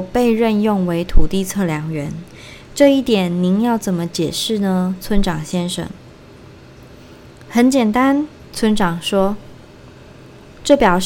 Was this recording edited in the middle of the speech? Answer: yes; 1 cut; at 8.5 s

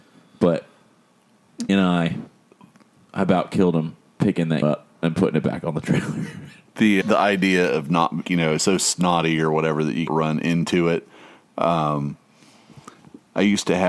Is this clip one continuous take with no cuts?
no; 6 cuts; at 1.7 s, 4.6 s, 7.0 s, 8.2 s, 8.6 s, 10.1 s

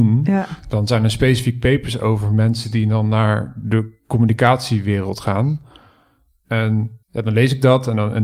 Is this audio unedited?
no; 1 cut; at 7.0 s

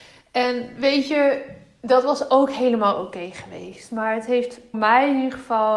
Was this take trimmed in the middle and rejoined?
yes; 1 cut; at 4.7 s

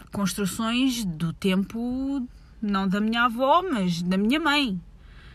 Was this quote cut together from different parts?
no; 0 cuts

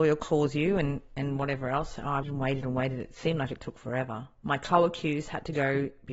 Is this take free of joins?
no; 2 cuts; at 2.2 s, 4.4 s

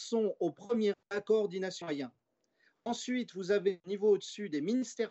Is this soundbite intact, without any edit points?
no; 2 cuts; at 0.9 s, 1.8 s

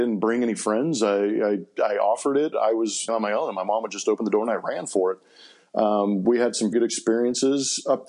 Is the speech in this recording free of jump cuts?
no; 3 cuts; at 2.5 s, 3.1 s, 6.7 s

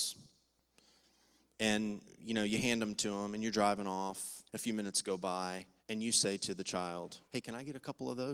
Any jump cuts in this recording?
yes; 3 cuts; at 4.5 s, 5.8 s, 7.2 s

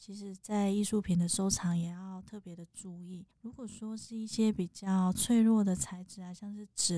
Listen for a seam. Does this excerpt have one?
yes; 1 cut; at 3.3 s

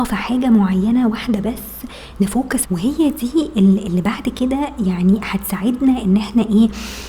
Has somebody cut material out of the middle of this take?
yes; 1 cut; at 2.6 s

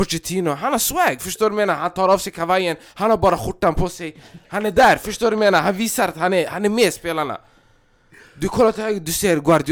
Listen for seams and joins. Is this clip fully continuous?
yes; 0 cuts

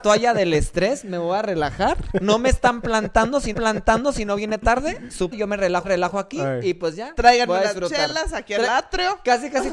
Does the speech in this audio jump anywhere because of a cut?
yes; 3 cuts; at 3.5 s, 5.3 s, 5.8 s

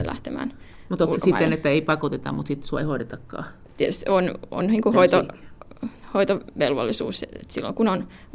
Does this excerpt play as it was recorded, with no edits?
yes; 0 cuts

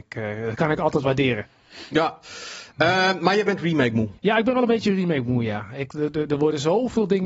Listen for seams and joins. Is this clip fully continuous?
no; 2 cuts; at 1.0 s, 4.2 s

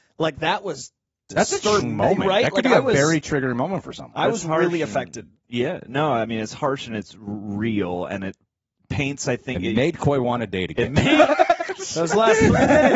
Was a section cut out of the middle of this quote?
yes; 1 cut; at 1.8 s

